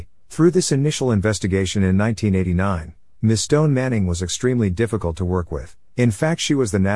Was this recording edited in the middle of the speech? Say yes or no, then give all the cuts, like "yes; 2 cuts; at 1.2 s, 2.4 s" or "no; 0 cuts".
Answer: no; 0 cuts